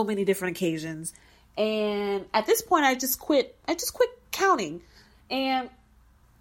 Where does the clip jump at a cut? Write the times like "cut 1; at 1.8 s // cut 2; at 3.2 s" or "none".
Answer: none